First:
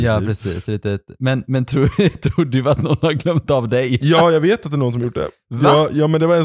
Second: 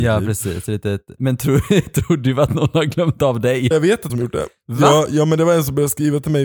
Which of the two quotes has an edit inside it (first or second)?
second